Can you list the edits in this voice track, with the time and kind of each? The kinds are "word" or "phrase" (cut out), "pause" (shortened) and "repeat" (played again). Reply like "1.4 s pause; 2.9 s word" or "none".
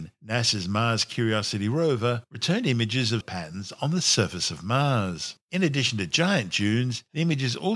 3.2 s word; 5.4 s pause